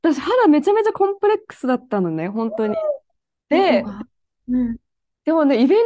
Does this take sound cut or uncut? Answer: uncut